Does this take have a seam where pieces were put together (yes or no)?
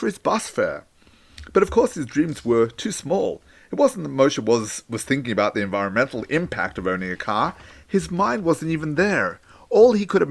no